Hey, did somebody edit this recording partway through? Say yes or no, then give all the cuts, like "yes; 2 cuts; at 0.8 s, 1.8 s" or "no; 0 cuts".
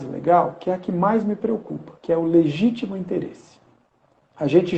yes; 1 cut; at 2.0 s